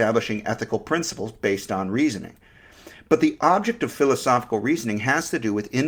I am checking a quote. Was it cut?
no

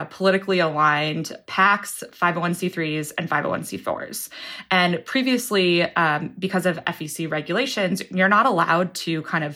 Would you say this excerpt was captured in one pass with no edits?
yes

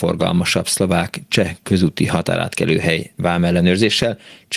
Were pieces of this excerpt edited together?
no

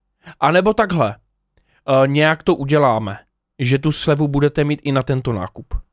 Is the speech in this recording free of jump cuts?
yes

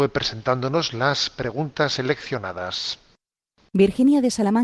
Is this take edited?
no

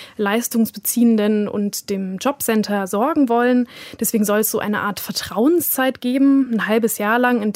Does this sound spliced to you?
no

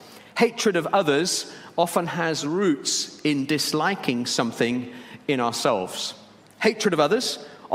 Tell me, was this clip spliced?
no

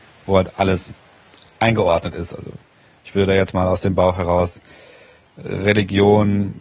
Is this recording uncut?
yes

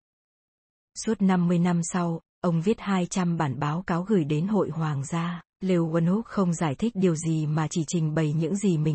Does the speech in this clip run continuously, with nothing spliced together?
no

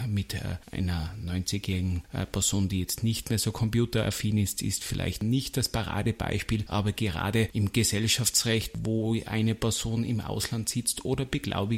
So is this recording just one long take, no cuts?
yes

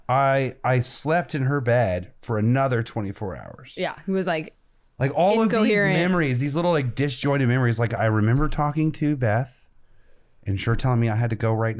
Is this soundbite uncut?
yes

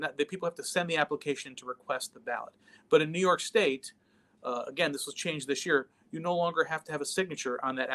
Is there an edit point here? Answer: no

